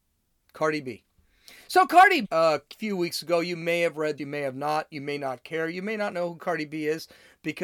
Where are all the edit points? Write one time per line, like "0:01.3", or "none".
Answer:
0:02.2
0:04.2